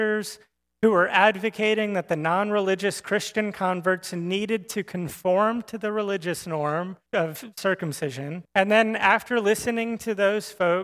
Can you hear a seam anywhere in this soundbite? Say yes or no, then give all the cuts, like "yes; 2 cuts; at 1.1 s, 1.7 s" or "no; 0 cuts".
yes; 2 cuts; at 7.1 s, 8.4 s